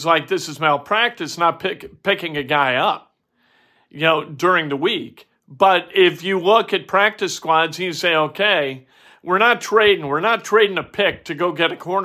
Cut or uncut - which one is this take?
uncut